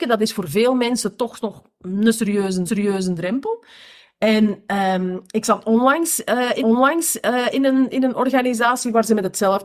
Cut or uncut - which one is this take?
cut